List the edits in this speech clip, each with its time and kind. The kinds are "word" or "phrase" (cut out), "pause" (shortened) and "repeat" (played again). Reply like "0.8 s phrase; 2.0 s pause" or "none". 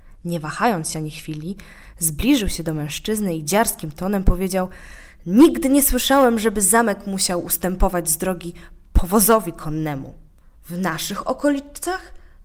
none